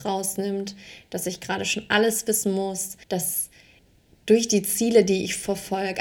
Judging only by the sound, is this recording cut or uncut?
cut